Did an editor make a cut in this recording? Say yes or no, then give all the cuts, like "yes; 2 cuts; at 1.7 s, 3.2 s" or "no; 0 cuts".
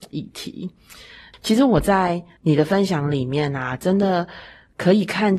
no; 0 cuts